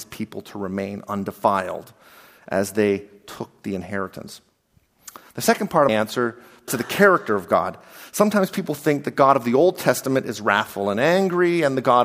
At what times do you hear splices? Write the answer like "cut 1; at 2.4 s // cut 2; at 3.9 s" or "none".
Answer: cut 1; at 5.9 s // cut 2; at 6.7 s